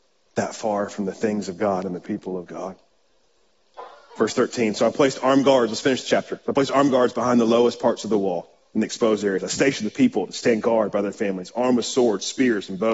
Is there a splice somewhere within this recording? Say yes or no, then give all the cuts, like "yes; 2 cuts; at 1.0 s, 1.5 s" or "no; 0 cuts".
no; 0 cuts